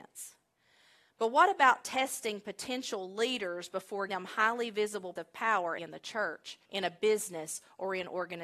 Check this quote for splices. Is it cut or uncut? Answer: cut